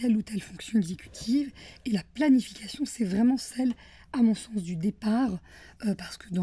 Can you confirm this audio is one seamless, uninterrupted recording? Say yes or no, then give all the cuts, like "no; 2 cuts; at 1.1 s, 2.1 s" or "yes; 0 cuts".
yes; 0 cuts